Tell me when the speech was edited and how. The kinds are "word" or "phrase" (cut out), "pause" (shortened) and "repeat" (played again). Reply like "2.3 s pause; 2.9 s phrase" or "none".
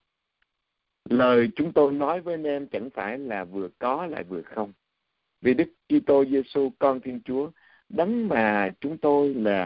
none